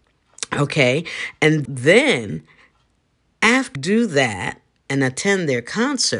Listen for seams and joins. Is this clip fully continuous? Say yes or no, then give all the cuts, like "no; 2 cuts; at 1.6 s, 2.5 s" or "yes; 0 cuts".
no; 2 cuts; at 1.7 s, 3.8 s